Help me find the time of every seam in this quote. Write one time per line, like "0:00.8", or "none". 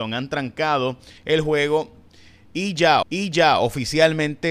0:01.2
0:03.0